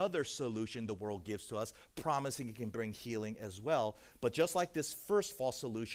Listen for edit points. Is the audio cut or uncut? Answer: uncut